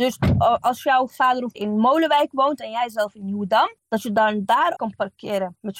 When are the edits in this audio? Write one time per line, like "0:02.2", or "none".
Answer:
0:01.5
0:03.8
0:04.8